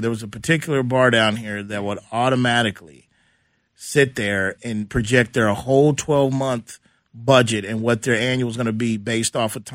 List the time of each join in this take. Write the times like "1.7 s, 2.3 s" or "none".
4.6 s